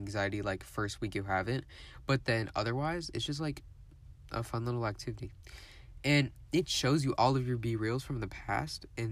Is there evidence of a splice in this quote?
no; 0 cuts

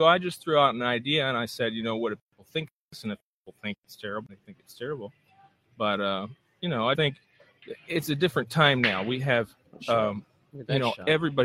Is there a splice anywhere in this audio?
yes; 2 cuts; at 4.3 s, 6.9 s

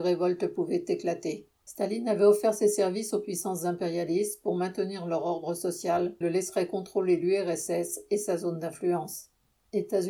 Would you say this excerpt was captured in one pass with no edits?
no; 1 cut; at 6.2 s

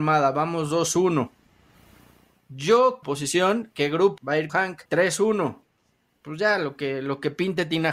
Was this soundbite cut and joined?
yes; 4 cuts; at 3.0 s, 4.2 s, 4.5 s, 4.8 s

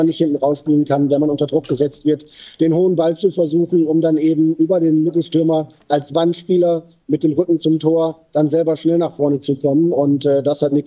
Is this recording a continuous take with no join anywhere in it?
yes; 0 cuts

